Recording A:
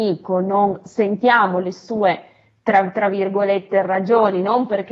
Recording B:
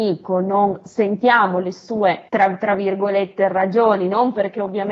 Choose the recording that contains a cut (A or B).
B